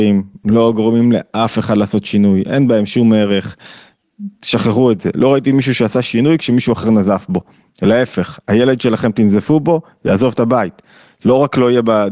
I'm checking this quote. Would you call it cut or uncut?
uncut